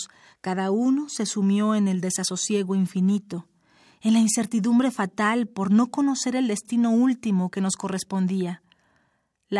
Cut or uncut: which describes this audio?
uncut